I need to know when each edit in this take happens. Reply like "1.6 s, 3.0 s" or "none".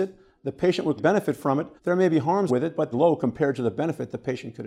1.0 s, 1.8 s, 2.5 s, 2.9 s